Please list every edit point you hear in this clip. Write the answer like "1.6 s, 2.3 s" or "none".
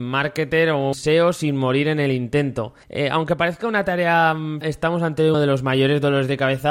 0.9 s, 2.8 s, 4.6 s, 5.3 s